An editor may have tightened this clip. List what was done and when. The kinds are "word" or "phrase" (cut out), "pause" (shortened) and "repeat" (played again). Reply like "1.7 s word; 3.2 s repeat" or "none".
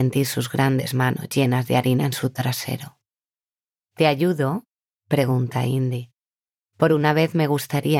none